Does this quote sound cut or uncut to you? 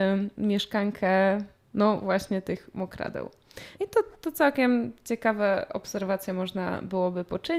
cut